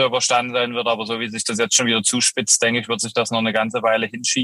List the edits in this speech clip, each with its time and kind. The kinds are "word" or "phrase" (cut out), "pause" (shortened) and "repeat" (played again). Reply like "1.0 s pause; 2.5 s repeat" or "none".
none

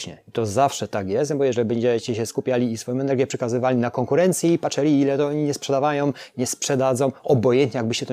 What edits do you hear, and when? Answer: none

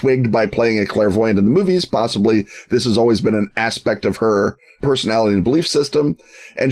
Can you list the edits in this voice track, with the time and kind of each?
none

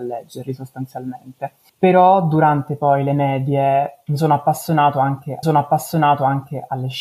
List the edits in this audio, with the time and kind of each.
5.4 s repeat

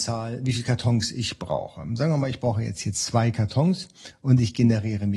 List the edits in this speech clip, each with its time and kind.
none

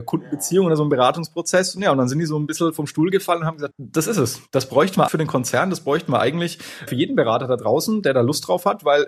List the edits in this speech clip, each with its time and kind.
3.7 s word; 5.1 s word; 6.9 s word

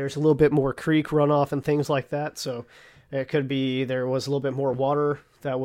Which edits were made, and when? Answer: none

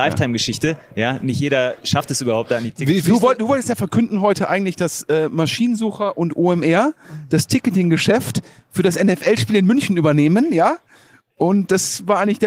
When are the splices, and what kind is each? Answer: none

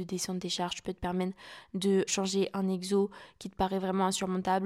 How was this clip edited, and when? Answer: 2.1 s word

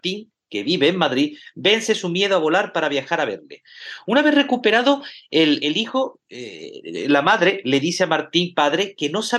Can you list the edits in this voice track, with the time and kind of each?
5.6 s word

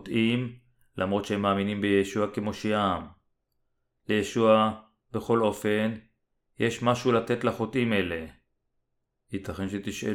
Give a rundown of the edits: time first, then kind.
none

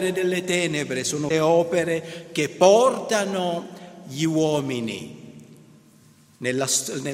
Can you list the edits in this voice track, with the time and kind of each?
1.3 s word

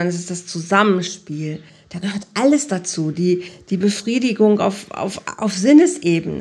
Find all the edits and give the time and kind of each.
none

